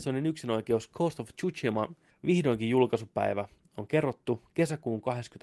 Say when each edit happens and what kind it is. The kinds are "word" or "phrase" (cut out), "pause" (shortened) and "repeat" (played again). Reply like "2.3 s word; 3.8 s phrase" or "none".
none